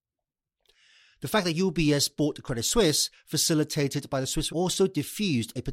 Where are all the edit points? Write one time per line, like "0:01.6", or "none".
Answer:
0:04.5